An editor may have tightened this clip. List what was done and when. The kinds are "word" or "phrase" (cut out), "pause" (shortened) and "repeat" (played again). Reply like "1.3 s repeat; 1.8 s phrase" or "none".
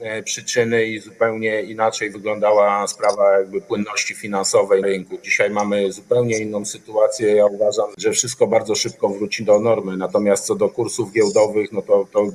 4.8 s word